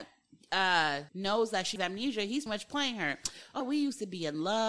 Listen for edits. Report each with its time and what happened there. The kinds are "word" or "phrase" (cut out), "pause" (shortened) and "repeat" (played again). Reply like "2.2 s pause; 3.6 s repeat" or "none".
1.1 s word; 1.8 s word; 2.5 s word; 3.6 s word